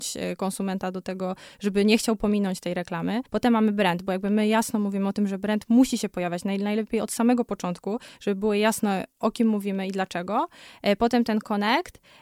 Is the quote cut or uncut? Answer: cut